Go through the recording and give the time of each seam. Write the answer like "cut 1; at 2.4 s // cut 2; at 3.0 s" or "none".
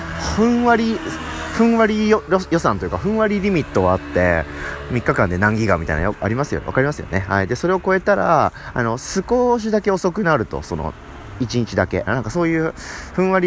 cut 1; at 12.1 s